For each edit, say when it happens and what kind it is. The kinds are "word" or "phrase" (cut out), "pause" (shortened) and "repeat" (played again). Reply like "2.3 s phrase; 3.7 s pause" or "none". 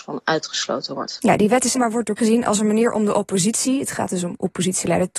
1.7 s word; 2.2 s word